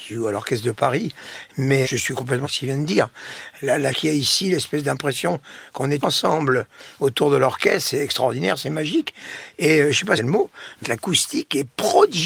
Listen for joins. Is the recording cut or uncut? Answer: cut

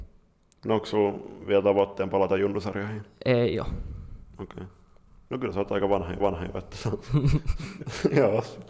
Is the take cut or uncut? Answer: cut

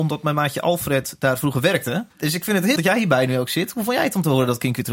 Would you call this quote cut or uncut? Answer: cut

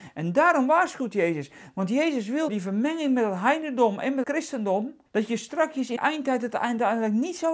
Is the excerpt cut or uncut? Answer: cut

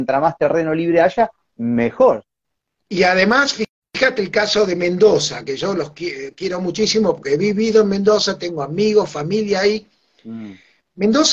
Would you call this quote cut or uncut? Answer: uncut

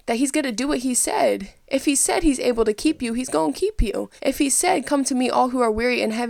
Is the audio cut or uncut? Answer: cut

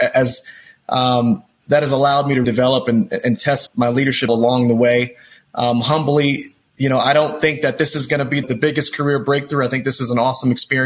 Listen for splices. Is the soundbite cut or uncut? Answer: cut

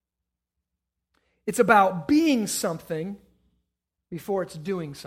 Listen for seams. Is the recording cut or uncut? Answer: uncut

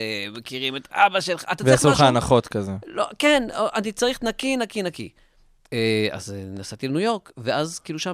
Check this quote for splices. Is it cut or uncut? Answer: uncut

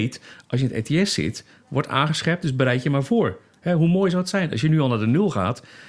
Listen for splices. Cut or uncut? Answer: uncut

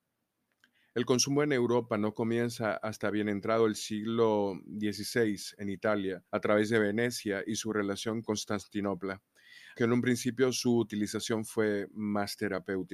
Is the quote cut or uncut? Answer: cut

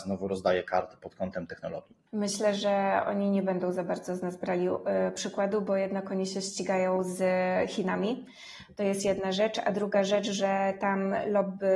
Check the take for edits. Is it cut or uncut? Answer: cut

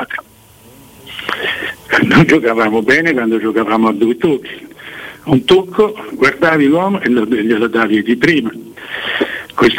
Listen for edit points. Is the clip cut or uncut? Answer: uncut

